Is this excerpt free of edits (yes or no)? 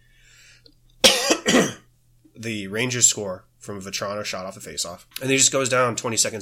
no